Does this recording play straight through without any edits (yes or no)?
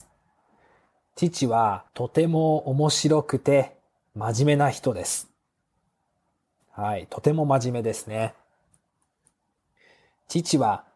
no